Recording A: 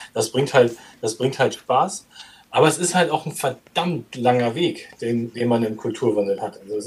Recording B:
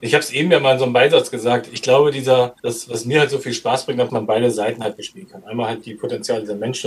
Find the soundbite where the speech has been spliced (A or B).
B